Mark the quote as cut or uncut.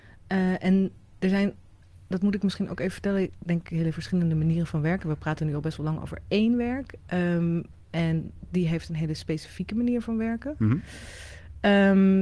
uncut